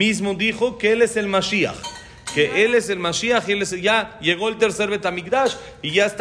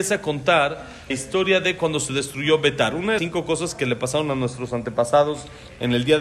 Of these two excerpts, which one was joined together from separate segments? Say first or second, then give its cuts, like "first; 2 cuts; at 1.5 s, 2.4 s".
second; 2 cuts; at 1.1 s, 3.2 s